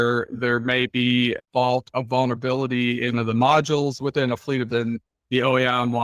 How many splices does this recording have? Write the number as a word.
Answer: three